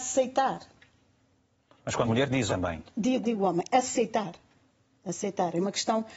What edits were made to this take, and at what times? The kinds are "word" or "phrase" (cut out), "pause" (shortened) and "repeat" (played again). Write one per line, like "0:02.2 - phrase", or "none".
0:02.0 - word
0:02.5 - word
0:03.2 - word